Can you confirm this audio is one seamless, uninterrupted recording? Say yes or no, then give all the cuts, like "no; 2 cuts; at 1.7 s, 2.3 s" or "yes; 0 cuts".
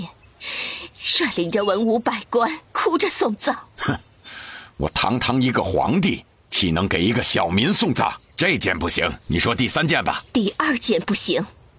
no; 5 cuts; at 2.7 s, 3.7 s, 8.2 s, 9.2 s, 10.3 s